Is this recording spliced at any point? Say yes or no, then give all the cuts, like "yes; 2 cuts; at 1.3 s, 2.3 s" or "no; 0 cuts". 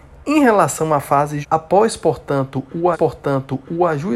yes; 2 cuts; at 1.4 s, 2.9 s